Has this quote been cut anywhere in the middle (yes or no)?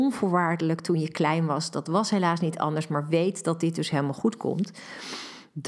no